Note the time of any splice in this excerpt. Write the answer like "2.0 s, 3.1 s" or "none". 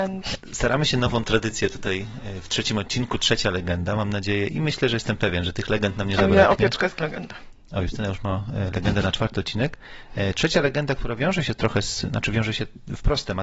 7.0 s